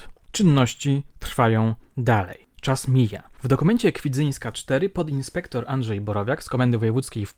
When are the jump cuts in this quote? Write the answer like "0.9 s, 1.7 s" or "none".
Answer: none

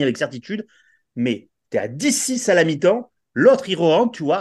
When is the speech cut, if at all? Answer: none

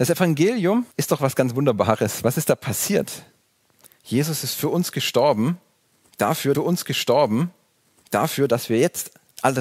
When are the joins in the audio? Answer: 0.9 s, 6.5 s

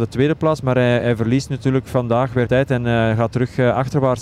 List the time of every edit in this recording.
2.5 s

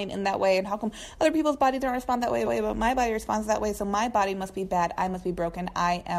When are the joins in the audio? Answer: 2.5 s

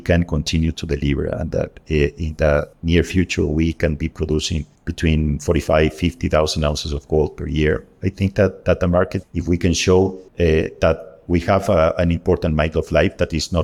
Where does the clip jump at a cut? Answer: 2.7 s, 4.8 s, 9.2 s, 10.3 s

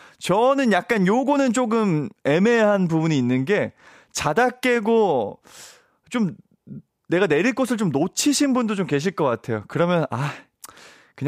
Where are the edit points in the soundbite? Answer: none

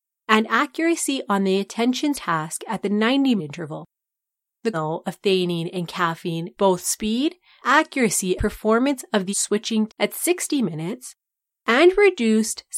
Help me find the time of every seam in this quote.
2.1 s, 3.4 s, 4.7 s, 6.6 s, 7.6 s, 8.4 s, 9.3 s, 9.9 s

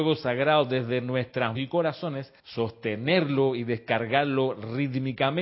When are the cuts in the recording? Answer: 1.5 s, 2.4 s

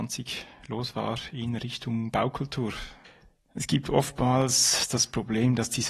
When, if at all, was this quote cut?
none

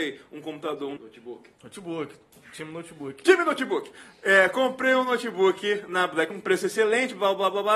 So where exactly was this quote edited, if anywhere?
1.0 s, 1.5 s, 6.3 s

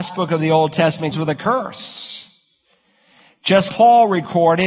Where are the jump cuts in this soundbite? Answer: 1.1 s, 3.7 s

